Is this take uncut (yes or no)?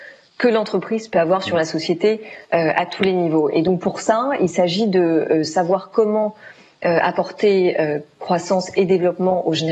yes